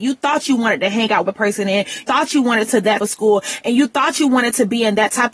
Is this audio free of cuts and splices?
no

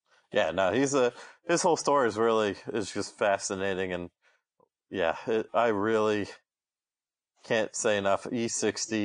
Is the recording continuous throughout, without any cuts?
yes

